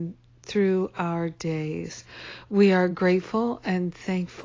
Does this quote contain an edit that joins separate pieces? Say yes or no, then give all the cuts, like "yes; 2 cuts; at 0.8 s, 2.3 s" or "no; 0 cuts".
no; 0 cuts